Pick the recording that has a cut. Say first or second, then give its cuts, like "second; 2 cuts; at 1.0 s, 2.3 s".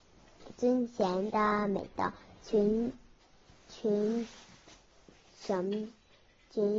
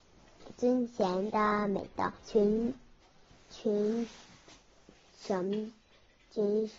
second; 1 cut; at 2.2 s